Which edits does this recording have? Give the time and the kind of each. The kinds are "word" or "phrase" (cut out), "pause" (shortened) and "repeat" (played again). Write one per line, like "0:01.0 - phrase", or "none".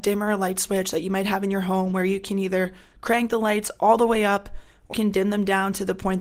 0:04.9 - word

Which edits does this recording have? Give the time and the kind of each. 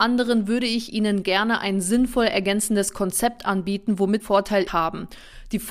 0:04.2 - word
0:04.7 - word

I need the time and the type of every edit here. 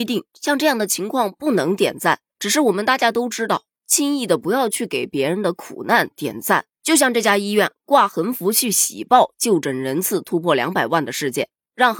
0:06.7 - pause

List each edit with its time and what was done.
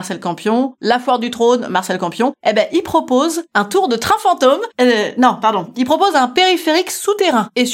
none

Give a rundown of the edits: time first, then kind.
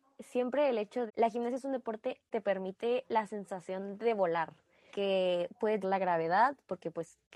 0:01.1 - word
0:02.3 - word
0:04.9 - word
0:05.8 - word

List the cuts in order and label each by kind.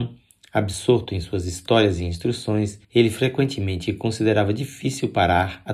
0:02.8 - pause

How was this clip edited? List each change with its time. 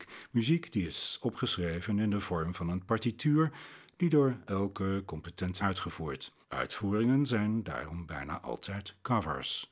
0:05.6 - phrase
0:06.4 - pause

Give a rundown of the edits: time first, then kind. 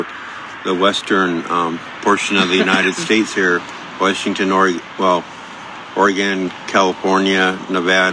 none

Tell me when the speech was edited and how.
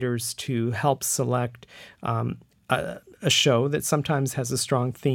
none

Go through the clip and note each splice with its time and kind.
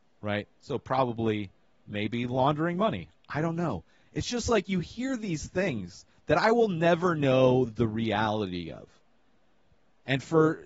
none

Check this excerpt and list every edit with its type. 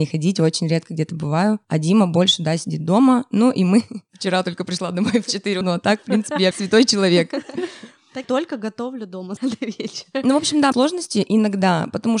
0:05.6 - word
0:06.5 - word
0:08.2 - word
0:09.4 - word
0:10.7 - word

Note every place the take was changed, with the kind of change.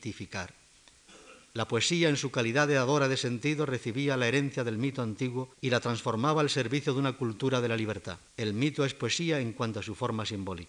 0:05.5 - pause
0:08.3 - pause

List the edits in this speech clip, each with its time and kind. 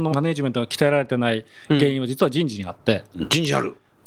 none

